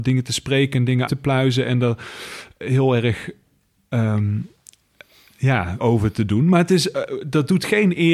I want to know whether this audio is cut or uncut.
cut